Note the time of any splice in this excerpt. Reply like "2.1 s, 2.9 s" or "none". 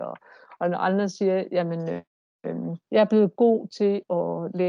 2.8 s